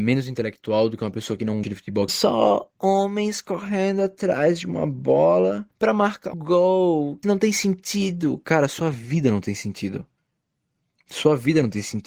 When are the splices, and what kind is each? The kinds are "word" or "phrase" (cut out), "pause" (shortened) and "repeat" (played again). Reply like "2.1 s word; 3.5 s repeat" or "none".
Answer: 1.6 s word; 2.1 s phrase; 2.8 s pause; 5.7 s pause; 6.3 s word; 7.2 s phrase

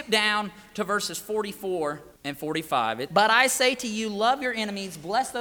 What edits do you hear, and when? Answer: 2.2 s pause; 3.1 s word

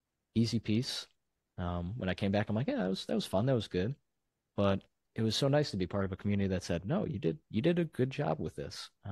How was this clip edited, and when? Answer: none

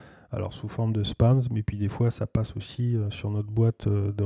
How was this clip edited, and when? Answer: none

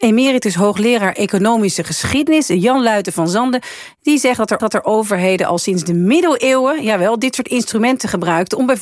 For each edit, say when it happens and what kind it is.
4.6 s repeat

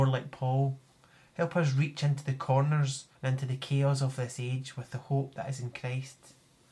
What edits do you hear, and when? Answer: 3.1 s pause

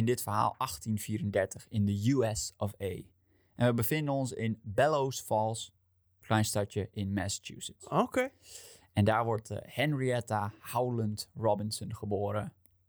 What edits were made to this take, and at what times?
none

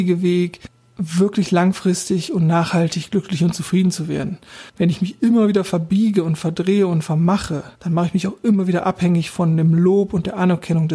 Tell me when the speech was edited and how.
4.7 s pause; 7.7 s pause

